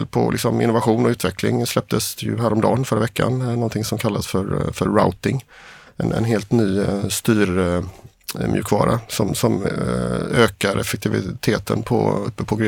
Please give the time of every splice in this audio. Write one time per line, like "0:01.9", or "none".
none